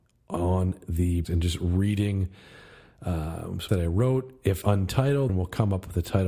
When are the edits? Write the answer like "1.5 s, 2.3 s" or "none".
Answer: 1.2 s, 3.7 s, 4.6 s, 5.3 s